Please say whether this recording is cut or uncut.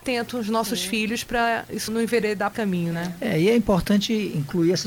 cut